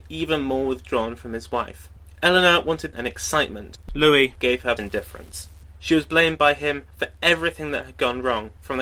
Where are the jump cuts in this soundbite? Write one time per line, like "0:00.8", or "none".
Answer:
0:02.9
0:04.8